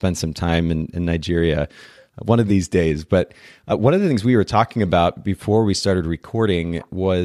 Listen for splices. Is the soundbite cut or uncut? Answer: uncut